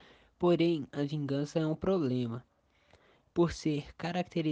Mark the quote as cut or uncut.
uncut